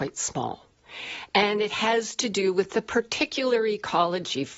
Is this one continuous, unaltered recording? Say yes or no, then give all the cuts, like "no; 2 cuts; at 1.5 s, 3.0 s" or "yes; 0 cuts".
yes; 0 cuts